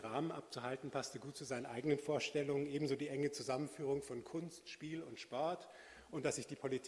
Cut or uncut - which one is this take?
uncut